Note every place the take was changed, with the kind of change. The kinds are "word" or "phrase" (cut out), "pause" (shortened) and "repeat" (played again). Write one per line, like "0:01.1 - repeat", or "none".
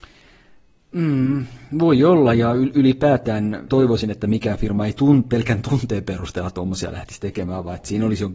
0:03.7 - word